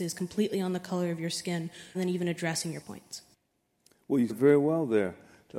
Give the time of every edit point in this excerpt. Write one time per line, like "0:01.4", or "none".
0:01.9
0:02.8
0:04.3

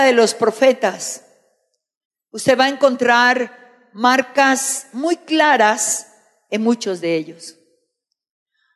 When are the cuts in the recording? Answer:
none

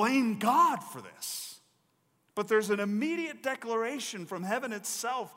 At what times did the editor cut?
none

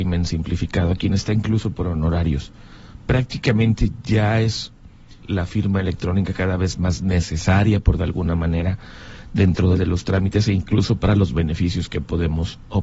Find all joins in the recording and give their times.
0:05.2
0:08.0
0:09.8

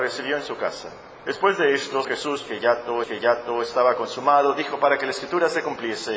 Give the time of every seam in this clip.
0:01.2
0:02.0
0:03.0

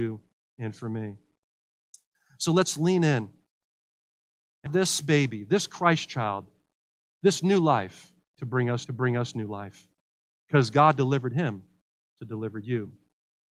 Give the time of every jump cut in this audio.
0:04.7
0:08.9

